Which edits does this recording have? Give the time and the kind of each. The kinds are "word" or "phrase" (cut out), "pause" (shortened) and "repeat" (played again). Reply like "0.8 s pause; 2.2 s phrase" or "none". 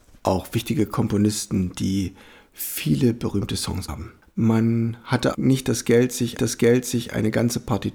3.9 s word; 4.2 s pause; 5.3 s word; 6.4 s repeat